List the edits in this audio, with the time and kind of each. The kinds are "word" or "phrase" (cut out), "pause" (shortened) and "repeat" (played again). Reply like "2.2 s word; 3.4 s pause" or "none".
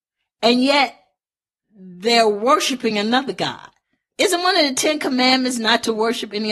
none

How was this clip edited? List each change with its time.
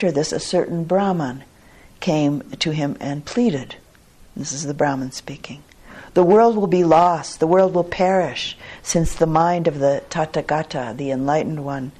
none

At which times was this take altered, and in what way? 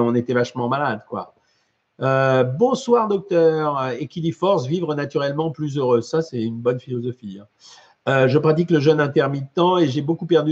none

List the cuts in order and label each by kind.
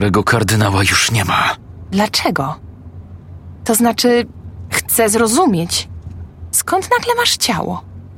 none

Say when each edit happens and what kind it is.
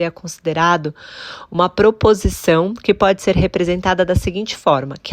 none

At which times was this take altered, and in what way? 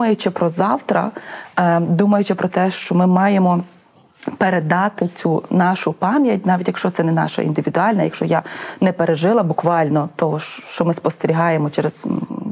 none

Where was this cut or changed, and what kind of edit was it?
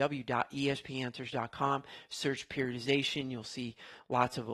none

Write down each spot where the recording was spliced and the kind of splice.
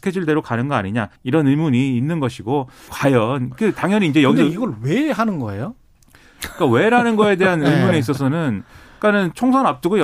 1.2 s pause; 2.9 s word

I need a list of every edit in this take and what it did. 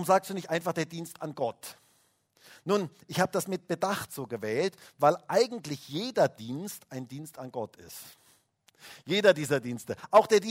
none

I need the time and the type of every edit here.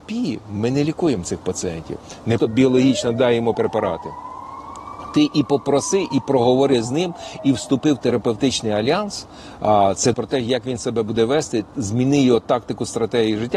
2.4 s word; 3.5 s word; 10.1 s word

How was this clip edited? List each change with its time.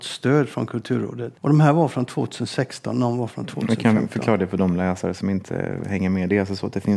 1.4 s pause

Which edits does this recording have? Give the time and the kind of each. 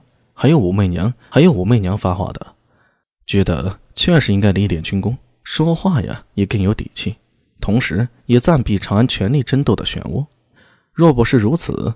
none

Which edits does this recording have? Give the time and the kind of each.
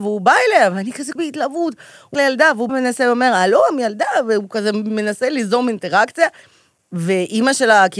1.2 s word; 2.1 s word; 2.7 s word; 4.5 s word

